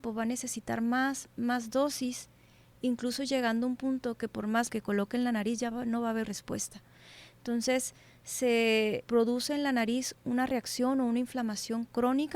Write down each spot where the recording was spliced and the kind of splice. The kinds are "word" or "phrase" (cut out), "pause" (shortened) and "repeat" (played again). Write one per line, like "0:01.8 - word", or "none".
0:01.4 - word
0:04.7 - word
0:06.2 - word
0:09.0 - word